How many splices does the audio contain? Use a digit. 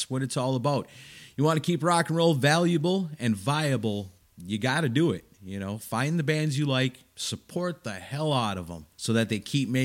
2